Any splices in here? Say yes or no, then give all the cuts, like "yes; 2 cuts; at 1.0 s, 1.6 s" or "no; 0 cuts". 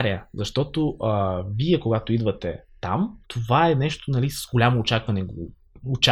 yes; 1 cut; at 3.2 s